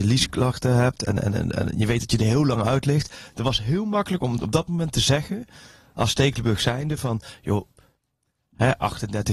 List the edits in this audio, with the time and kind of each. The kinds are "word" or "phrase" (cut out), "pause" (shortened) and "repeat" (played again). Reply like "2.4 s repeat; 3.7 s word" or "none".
none